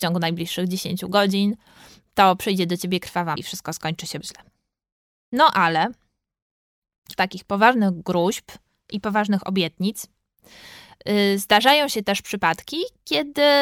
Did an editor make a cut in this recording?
yes; 3 cuts; at 3.4 s, 4.2 s, 7.2 s

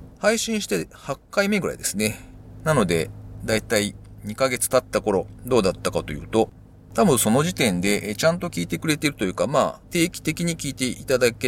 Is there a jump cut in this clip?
no; 0 cuts

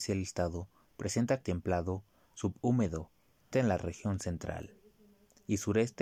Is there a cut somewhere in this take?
yes; 2 cuts; at 1.4 s, 3.5 s

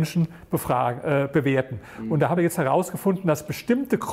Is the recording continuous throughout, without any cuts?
no; 1 cut; at 2.4 s

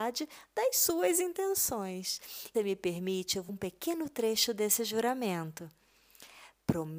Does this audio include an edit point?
yes; 2 cuts; at 2.5 s, 3.5 s

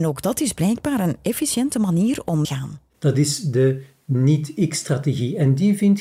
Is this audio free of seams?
no; 1 cut; at 2.4 s

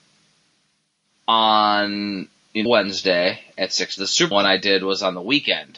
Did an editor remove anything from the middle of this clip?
yes; 3 cuts; at 2.7 s, 4.0 s, 4.3 s

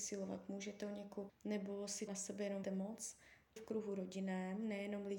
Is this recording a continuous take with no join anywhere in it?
no; 4 cuts; at 1.3 s, 2.1 s, 2.6 s, 3.6 s

